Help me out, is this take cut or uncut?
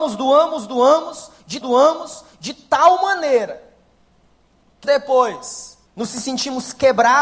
cut